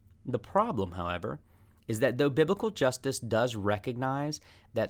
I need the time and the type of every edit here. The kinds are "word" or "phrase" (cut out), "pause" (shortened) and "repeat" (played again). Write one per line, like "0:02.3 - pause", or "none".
none